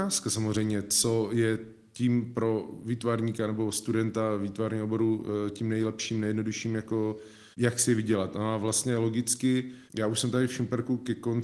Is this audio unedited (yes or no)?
no